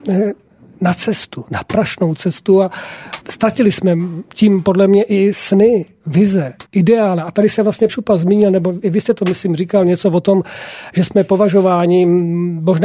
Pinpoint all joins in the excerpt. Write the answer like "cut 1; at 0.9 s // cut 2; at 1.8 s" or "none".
cut 1; at 3.2 s // cut 2; at 6.7 s // cut 3; at 7.9 s